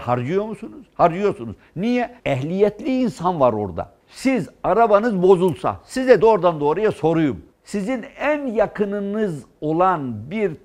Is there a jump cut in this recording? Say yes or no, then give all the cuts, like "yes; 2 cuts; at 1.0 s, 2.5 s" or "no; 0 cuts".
yes; 4 cuts; at 2.2 s, 4.0 s, 6.2 s, 7.5 s